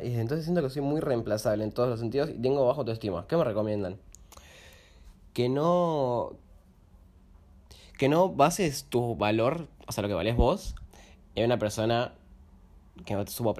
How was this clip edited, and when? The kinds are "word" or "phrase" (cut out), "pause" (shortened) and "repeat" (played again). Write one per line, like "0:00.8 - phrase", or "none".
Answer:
none

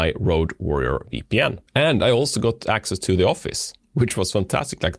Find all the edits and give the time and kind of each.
0:01.7 - pause

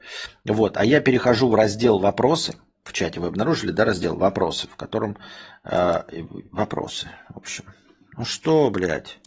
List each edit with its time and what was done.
none

